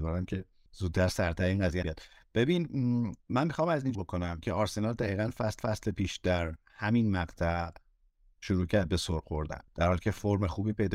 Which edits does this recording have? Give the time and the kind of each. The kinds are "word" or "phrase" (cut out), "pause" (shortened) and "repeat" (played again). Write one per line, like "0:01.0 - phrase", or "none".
0:01.8 - word
0:03.2 - pause
0:03.9 - word
0:05.6 - repeat

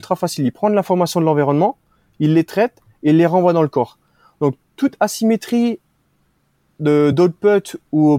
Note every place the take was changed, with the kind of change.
none

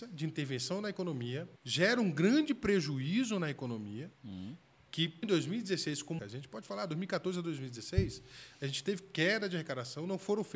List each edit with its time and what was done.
0:01.6 - pause
0:04.1 - pause
0:05.2 - word
0:06.2 - phrase

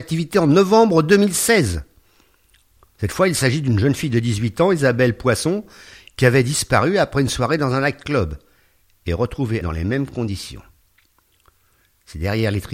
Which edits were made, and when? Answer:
0:09.6 - word

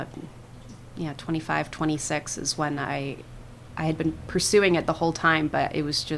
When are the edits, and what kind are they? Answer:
none

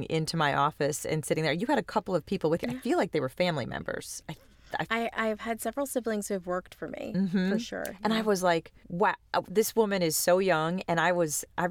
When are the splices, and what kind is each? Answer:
0:08.8 - pause

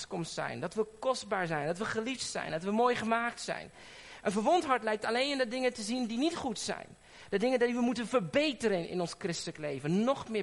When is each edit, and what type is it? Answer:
none

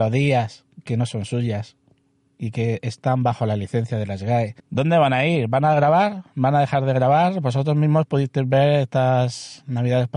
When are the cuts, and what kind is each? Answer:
0:04.6 - pause

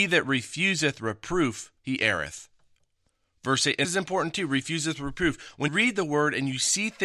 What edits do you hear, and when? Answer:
0:01.8 - pause
0:03.0 - pause
0:03.8 - word
0:05.7 - word

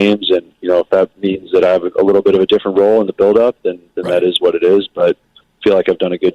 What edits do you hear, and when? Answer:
none

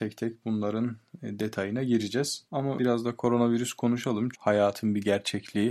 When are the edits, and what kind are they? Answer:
0:02.8 - word
0:04.3 - word

